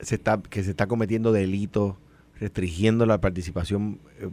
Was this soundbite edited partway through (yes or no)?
no